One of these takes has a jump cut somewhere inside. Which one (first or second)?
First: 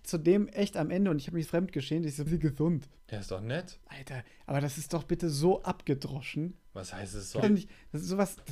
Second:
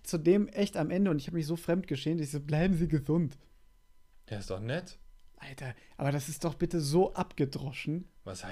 first